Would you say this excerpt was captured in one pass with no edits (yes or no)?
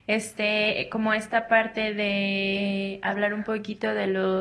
yes